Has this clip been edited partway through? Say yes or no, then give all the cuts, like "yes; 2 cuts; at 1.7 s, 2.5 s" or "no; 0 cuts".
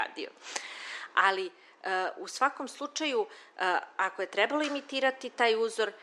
no; 0 cuts